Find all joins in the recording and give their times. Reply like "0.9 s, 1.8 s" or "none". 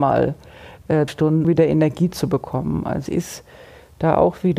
1.1 s, 1.4 s, 3.1 s